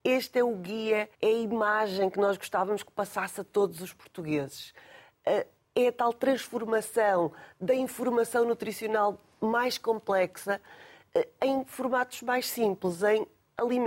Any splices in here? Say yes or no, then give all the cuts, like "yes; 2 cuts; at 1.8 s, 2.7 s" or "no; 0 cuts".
yes; 2 cuts; at 1.1 s, 5.6 s